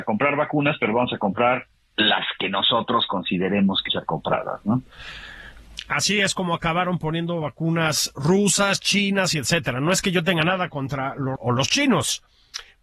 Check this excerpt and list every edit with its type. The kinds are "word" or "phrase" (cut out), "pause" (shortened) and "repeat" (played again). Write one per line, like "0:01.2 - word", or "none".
0:01.7 - pause
0:03.9 - word
0:11.4 - word